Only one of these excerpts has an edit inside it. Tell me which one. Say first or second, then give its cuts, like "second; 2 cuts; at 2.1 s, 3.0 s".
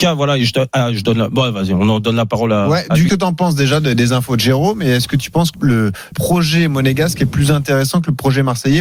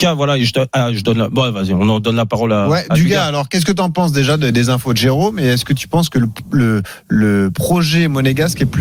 first; 3 cuts; at 3.1 s, 5.5 s, 6.1 s